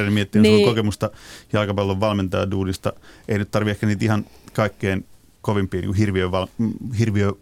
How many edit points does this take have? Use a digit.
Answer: 0